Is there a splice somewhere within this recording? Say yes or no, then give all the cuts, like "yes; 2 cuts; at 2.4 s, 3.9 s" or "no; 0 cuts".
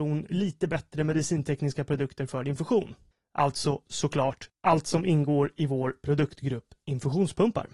no; 0 cuts